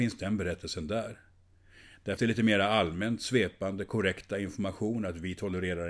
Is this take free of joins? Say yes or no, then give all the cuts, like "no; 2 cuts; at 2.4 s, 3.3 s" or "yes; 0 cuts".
no; 1 cut; at 2.2 s